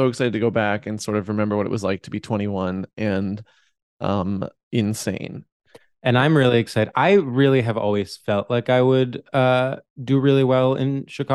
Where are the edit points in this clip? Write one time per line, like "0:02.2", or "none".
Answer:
none

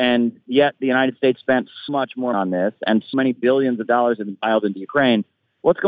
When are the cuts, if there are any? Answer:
0:01.4
0:01.9
0:02.3
0:03.1

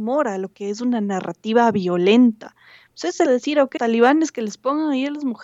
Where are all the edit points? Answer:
0:03.3
0:03.8

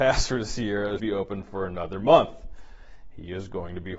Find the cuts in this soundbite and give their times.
0:01.0

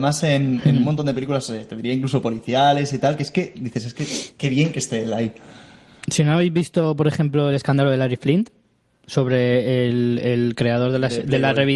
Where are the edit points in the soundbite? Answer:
none

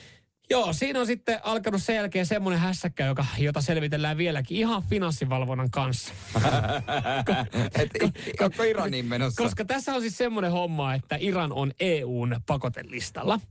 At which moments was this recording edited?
none

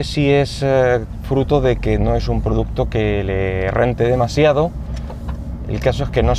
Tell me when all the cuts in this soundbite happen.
none

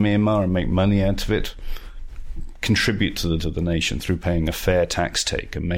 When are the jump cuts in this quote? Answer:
0:03.4

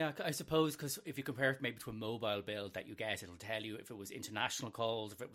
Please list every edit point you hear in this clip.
none

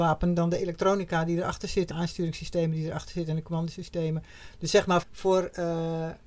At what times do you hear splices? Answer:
0:01.9
0:05.0

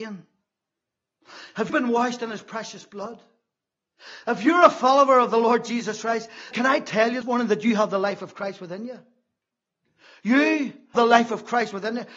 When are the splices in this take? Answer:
0:01.7
0:06.5
0:07.2
0:11.0

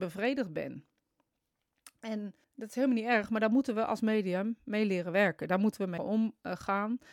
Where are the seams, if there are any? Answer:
0:02.4
0:06.0

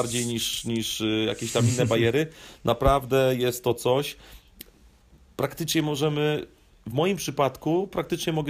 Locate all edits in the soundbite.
none

